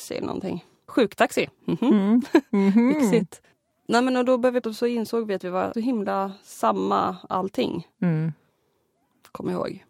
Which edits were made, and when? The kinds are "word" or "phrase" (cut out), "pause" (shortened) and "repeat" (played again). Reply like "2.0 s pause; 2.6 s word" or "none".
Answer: 3.4 s pause; 4.6 s word; 5.7 s word